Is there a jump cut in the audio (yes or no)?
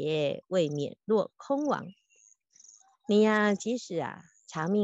no